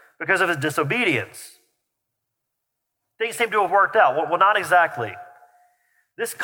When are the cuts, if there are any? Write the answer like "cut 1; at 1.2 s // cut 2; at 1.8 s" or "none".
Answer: none